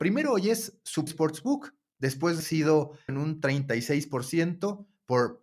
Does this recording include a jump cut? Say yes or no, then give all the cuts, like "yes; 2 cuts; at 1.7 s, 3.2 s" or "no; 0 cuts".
yes; 3 cuts; at 1.1 s, 2.4 s, 3.1 s